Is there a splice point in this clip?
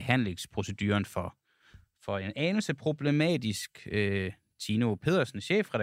no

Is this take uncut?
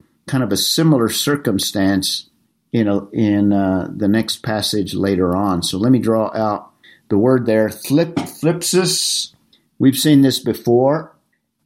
yes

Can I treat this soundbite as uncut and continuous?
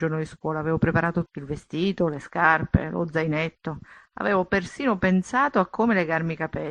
no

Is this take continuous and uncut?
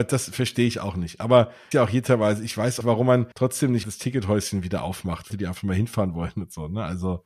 no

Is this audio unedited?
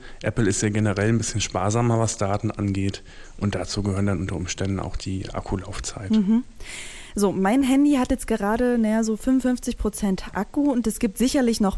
yes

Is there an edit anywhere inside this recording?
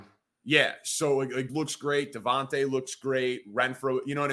yes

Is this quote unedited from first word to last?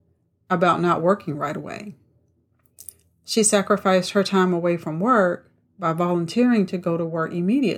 yes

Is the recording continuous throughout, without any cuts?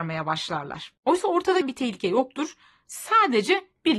no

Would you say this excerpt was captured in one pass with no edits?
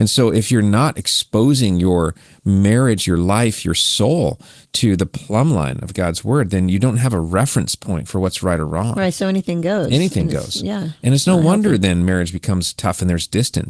yes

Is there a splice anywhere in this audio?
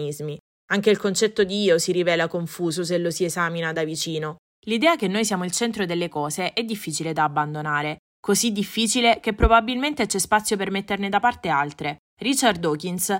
no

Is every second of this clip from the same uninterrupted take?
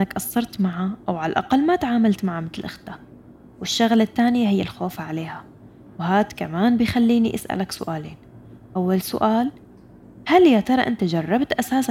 yes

